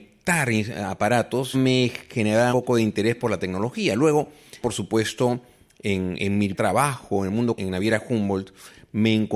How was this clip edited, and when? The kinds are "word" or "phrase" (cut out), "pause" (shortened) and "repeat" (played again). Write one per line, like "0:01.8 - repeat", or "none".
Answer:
0:01.5 - word
0:02.5 - word
0:04.6 - word
0:06.2 - word
0:06.5 - word
0:07.6 - word